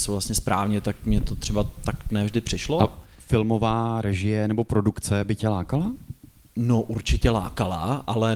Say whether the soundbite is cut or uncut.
uncut